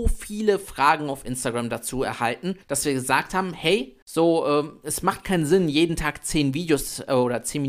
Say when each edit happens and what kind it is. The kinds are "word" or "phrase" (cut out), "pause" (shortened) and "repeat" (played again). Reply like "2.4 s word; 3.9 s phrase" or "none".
2.6 s pause; 4.0 s pause